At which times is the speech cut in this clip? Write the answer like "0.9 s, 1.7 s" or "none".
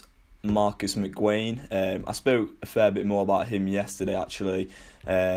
none